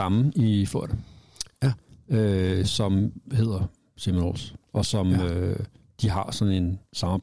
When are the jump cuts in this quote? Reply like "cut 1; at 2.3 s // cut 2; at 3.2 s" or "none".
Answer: none